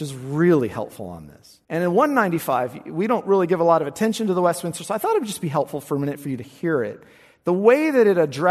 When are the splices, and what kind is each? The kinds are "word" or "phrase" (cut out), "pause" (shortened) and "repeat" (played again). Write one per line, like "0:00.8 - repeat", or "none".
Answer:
0:01.6 - pause